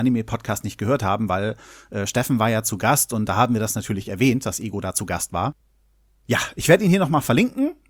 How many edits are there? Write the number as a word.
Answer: zero